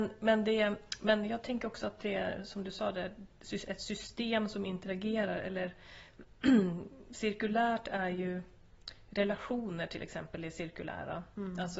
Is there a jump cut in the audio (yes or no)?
no